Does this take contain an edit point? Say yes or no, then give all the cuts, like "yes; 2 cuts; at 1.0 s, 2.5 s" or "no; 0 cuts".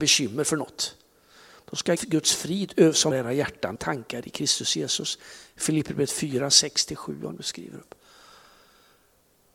yes; 3 cuts; at 2.0 s, 3.1 s, 3.8 s